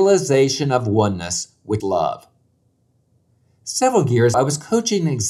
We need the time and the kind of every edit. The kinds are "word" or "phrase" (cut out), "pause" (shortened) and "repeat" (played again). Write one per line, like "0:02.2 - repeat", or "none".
0:01.8 - word
0:04.3 - word